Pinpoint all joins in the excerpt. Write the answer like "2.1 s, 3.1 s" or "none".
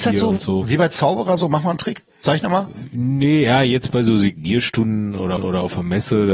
2.1 s, 5.4 s